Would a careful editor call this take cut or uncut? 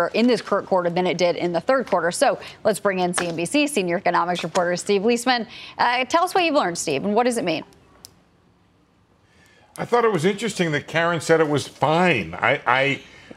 uncut